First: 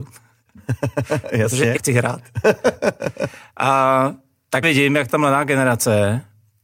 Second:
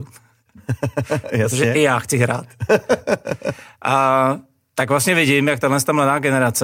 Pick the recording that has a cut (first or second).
first